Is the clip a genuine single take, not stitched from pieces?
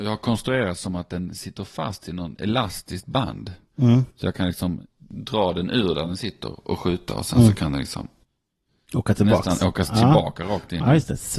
yes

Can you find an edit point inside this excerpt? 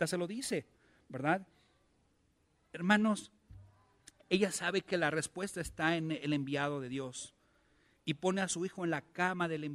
no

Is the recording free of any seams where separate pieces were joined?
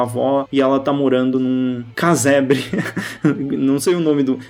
yes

